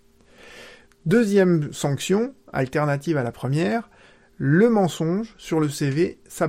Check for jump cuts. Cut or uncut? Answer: uncut